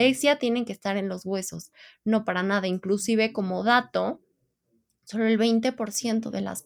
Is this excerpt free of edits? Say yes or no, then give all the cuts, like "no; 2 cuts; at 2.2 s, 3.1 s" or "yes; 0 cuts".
yes; 0 cuts